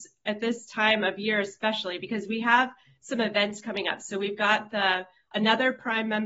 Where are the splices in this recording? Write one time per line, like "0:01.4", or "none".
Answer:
none

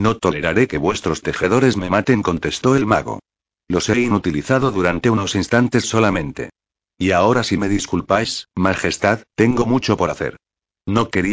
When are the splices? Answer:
none

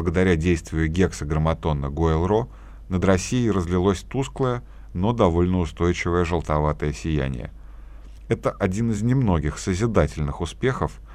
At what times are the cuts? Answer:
none

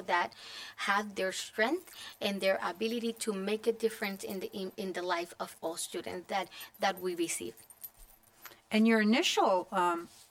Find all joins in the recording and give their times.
none

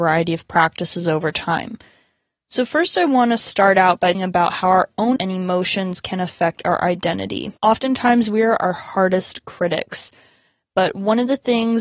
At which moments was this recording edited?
0:04.1
0:05.2
0:07.6

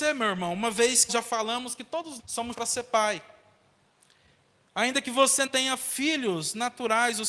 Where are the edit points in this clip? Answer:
0:01.1
0:02.2
0:02.5
0:05.5

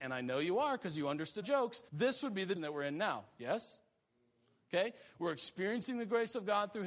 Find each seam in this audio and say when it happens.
0:01.4
0:01.9
0:02.6

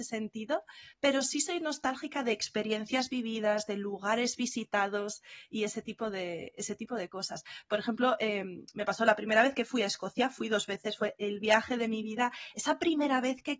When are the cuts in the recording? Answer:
0:00.9

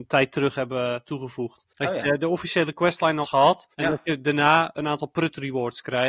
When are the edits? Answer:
0:01.7
0:03.2
0:03.7
0:04.8

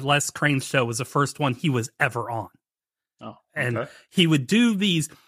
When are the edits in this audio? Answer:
none

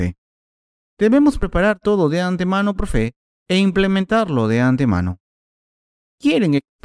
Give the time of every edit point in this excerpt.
none

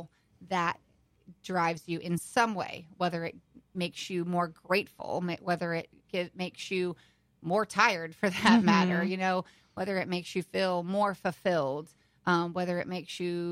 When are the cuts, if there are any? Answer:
none

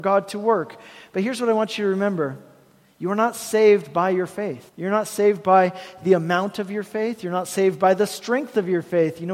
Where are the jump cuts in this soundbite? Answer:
0:04.7

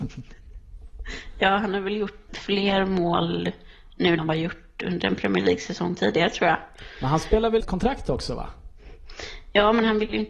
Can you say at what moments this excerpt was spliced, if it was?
0:02.3
0:04.2
0:07.6

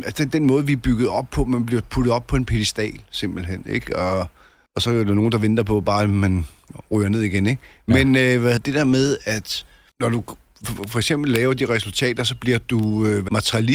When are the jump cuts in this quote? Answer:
0:08.6

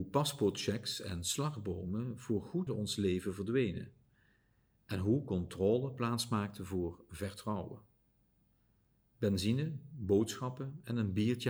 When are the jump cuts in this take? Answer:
0:02.7

